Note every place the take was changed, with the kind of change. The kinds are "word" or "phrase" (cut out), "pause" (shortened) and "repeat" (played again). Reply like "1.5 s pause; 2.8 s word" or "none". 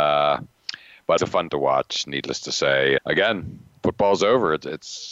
1.2 s word; 1.5 s word; 3.0 s word